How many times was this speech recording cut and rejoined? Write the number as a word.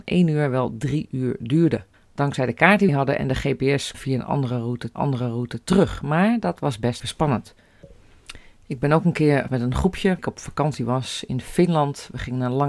seven